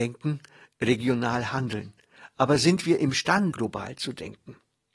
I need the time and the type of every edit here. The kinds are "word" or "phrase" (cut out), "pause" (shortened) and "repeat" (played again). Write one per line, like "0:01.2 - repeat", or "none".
0:03.5 - word